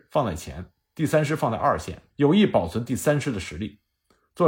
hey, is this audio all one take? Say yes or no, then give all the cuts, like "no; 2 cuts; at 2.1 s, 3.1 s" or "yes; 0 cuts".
no; 1 cut; at 2.1 s